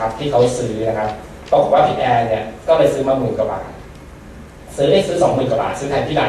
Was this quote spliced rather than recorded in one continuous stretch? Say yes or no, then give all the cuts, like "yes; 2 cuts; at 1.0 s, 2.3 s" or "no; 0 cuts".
no; 0 cuts